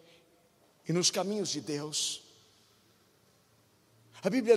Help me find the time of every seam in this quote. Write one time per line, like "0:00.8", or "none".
none